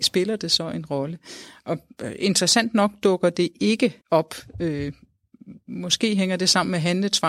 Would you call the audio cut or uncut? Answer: cut